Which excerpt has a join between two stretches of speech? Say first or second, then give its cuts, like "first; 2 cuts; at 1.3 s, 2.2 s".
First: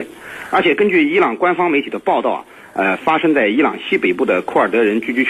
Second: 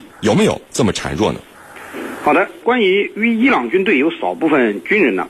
second; 1 cut; at 2.6 s